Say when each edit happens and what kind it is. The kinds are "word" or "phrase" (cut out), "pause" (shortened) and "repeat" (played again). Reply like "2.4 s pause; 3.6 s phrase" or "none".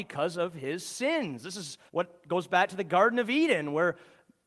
1.9 s pause